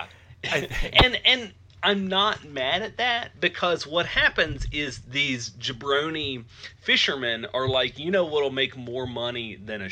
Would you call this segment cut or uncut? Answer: uncut